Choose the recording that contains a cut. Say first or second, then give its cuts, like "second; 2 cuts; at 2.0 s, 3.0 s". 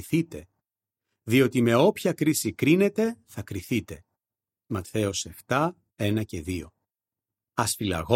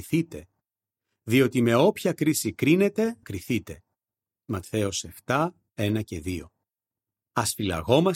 second; 1 cut; at 3.2 s